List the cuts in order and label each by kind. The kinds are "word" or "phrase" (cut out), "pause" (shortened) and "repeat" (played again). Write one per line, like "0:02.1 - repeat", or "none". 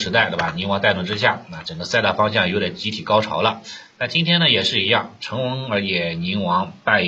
none